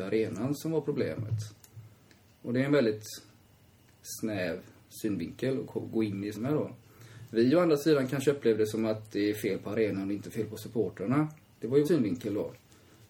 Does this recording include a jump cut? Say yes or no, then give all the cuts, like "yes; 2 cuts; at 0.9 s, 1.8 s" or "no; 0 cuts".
yes; 3 cuts; at 6.3 s, 11.4 s, 11.8 s